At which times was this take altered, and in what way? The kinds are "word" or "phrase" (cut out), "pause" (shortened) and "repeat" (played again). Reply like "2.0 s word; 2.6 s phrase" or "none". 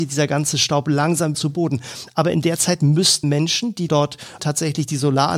1.3 s word; 3.2 s word; 3.9 s word; 4.4 s word